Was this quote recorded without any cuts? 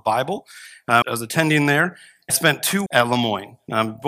no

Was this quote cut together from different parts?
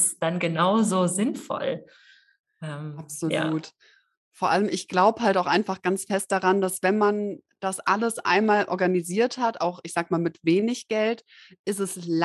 no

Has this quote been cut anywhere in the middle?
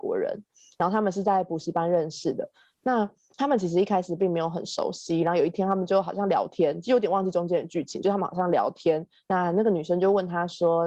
no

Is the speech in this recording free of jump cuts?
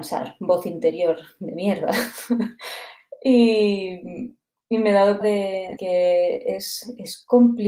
no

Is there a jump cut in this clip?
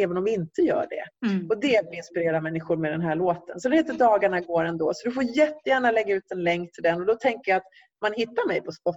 no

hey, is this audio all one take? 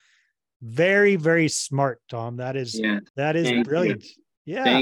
no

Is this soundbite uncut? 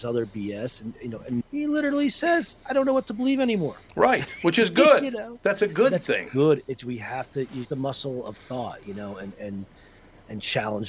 no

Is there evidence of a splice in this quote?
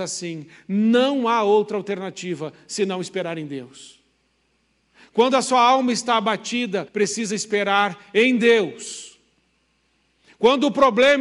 yes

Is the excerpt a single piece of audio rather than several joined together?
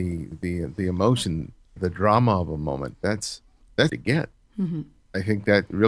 no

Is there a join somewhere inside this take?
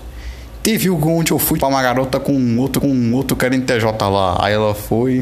yes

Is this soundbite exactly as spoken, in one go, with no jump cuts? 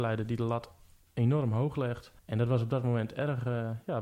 no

